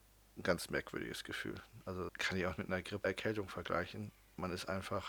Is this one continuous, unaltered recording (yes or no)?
no